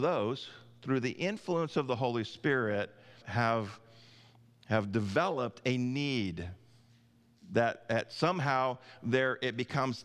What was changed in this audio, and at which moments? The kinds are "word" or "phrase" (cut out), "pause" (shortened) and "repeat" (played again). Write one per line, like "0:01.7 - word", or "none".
0:03.2 - word